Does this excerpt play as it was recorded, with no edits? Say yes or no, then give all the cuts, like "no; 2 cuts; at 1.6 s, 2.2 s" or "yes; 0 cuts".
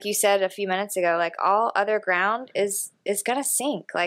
yes; 0 cuts